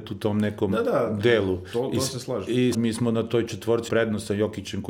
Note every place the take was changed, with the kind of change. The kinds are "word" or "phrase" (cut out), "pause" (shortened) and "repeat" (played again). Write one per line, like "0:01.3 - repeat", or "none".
0:02.7 - word
0:03.9 - word